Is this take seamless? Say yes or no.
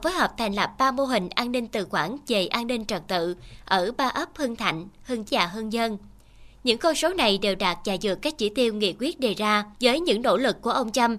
no